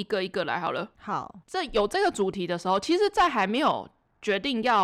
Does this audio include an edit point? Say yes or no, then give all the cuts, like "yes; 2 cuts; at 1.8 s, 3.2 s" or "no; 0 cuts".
yes; 1 cut; at 1.4 s